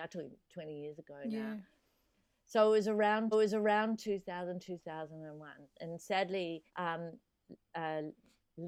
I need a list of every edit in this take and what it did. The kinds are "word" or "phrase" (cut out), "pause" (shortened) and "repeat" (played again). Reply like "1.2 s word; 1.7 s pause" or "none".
3.3 s repeat; 6.7 s pause

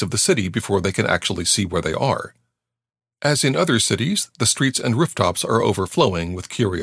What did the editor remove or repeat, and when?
none

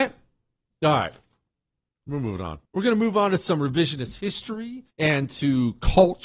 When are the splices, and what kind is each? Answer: 2.6 s pause; 4.9 s pause

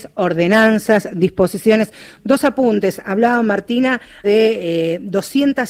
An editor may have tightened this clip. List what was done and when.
4.2 s word

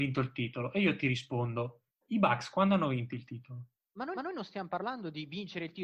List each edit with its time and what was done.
1.9 s pause; 3.7 s pause; 4.2 s repeat

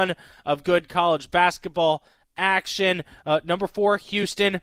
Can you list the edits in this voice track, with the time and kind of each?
none

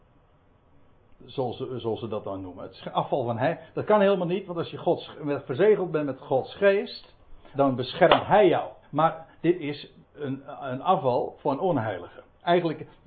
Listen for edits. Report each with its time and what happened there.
7.5 s word; 8.8 s pause; 10.0 s pause

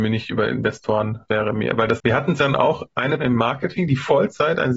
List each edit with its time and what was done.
1.3 s word; 2.0 s word; 2.4 s word; 3.2 s word

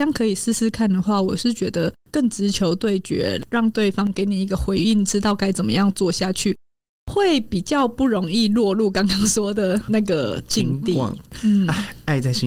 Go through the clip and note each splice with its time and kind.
9.9 s word

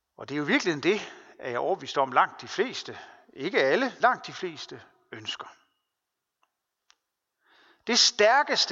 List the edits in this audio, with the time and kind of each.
4.0 s word

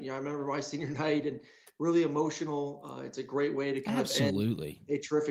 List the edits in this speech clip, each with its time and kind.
none

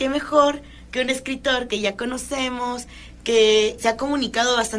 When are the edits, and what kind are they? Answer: 3.8 s word

